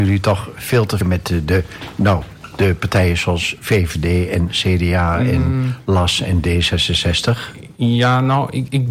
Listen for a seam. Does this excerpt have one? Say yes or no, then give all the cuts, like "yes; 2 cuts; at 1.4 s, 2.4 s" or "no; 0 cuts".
yes; 1 cut; at 1.0 s